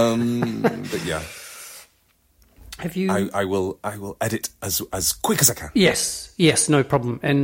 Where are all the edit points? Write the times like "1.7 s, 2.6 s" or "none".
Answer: none